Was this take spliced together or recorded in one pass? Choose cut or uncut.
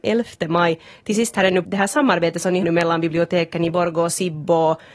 cut